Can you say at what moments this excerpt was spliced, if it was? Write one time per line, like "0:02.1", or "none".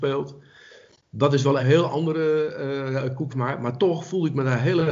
0:01.6
0:03.3